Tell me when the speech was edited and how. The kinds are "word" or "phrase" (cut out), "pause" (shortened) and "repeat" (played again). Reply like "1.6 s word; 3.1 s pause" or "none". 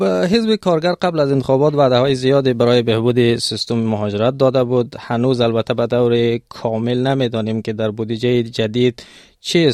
none